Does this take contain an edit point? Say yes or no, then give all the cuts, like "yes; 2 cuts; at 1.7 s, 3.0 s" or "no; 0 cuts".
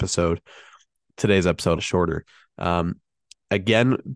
yes; 1 cut; at 1.8 s